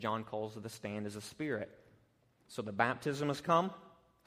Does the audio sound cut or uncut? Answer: uncut